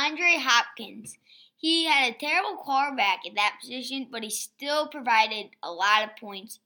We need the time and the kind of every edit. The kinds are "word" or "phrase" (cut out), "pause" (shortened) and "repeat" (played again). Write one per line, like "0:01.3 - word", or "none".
none